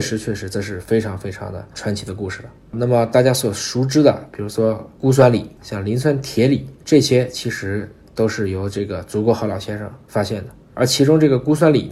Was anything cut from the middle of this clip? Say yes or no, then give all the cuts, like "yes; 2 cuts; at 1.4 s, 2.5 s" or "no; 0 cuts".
no; 0 cuts